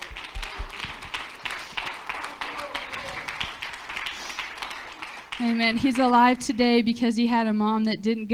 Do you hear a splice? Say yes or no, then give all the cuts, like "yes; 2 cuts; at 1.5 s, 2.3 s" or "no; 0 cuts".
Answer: no; 0 cuts